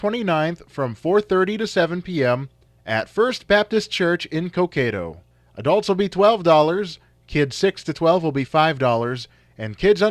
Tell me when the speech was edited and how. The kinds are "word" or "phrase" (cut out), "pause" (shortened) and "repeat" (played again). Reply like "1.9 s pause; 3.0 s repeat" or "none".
none

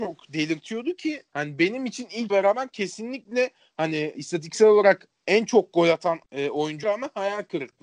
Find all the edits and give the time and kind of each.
1.3 s pause; 2.3 s phrase; 4.1 s word; 5.2 s pause; 6.2 s pause; 6.8 s word

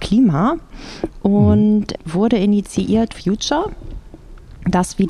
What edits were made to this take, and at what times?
2.0 s word; 3.1 s phrase

